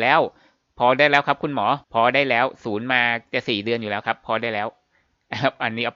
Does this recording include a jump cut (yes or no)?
yes